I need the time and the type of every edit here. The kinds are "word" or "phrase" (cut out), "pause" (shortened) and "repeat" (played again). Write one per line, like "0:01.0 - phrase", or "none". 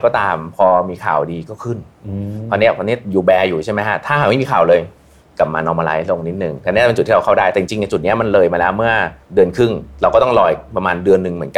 0:09.2 - pause